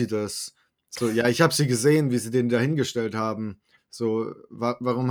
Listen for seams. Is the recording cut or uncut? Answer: uncut